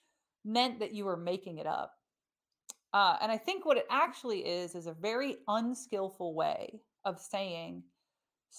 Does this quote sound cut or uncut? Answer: uncut